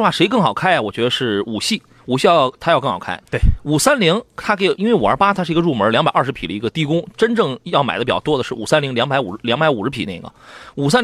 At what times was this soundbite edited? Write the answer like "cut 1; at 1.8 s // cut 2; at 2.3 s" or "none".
none